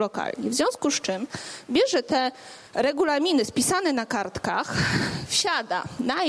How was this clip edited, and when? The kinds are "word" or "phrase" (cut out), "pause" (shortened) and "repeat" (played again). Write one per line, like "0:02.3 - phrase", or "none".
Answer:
0:02.7 - pause